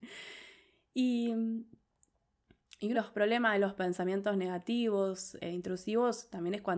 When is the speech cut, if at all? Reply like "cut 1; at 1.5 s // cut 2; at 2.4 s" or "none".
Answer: cut 1; at 2.9 s // cut 2; at 5.4 s